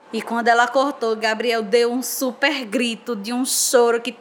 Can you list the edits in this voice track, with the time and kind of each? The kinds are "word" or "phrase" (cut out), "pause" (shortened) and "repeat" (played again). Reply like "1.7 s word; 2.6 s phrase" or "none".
none

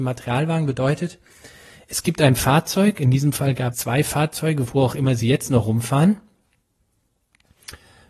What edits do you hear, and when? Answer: 3.7 s word

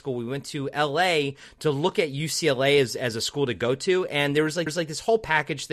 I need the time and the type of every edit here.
4.7 s repeat

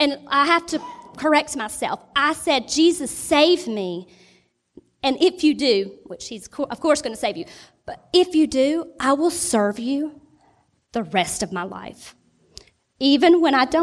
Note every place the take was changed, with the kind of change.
none

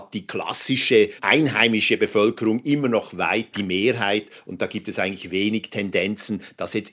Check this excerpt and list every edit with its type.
1.2 s word; 3.5 s word

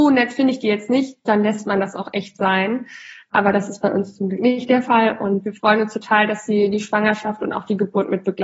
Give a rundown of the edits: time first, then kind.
none

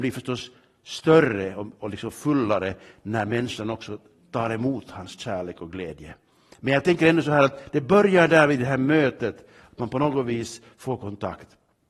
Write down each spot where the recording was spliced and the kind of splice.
none

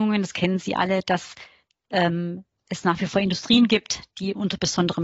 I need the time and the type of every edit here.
none

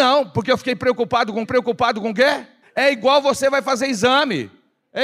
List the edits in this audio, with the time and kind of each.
1.4 s repeat; 2.6 s pause

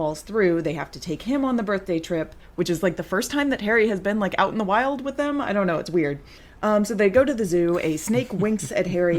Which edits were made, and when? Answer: none

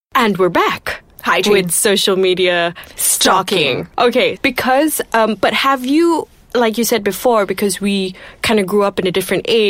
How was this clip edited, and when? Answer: 4.4 s word

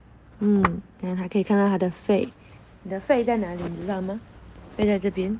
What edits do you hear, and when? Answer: 2.6 s pause

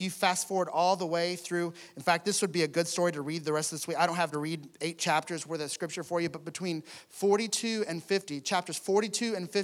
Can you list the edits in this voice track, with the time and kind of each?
4.3 s word

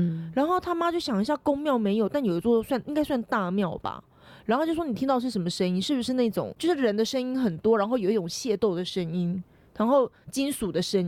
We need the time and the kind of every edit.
none

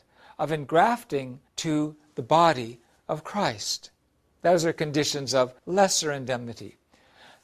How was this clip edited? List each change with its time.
1.5 s pause; 5.6 s pause

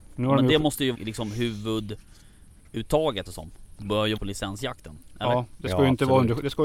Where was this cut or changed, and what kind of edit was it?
0.9 s word; 3.3 s word; 4.2 s word

